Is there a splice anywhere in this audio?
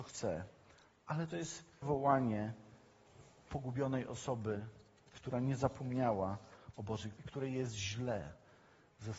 yes; 2 cuts; at 1.8 s, 7.2 s

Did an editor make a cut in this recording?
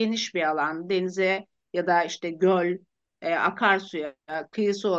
no; 0 cuts

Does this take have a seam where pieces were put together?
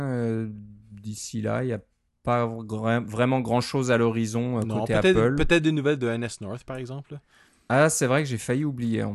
no; 0 cuts

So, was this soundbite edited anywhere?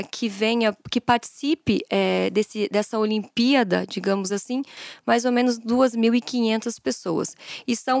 no; 0 cuts

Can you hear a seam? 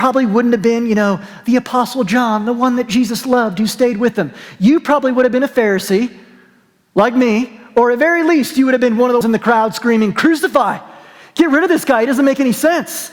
yes; 1 cut; at 9.2 s

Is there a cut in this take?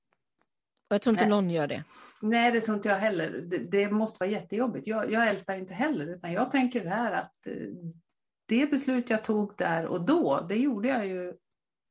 no; 0 cuts

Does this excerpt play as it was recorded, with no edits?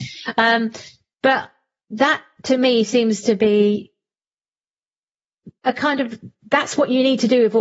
no; 1 cut; at 5.6 s

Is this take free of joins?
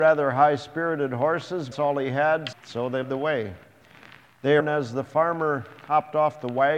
no; 4 cuts; at 1.7 s, 2.5 s, 3.0 s, 4.6 s

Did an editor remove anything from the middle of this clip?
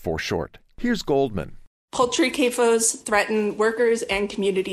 no; 0 cuts

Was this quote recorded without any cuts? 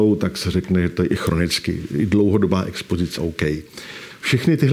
no; 1 cut; at 3.2 s

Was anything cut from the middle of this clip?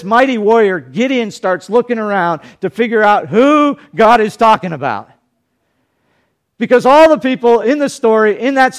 no; 0 cuts

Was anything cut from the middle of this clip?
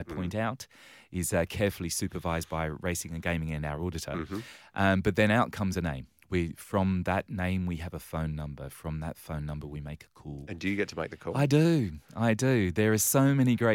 no; 0 cuts

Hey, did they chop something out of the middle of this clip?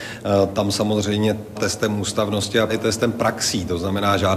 yes; 2 cuts; at 1.5 s, 2.7 s

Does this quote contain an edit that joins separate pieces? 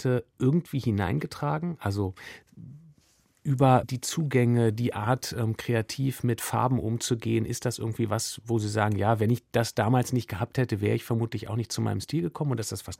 no; 0 cuts

